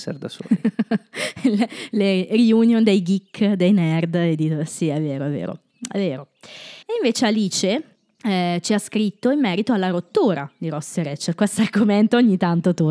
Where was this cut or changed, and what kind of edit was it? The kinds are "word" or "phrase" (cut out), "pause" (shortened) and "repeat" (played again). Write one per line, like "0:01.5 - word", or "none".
0:06.8 - pause
0:07.9 - pause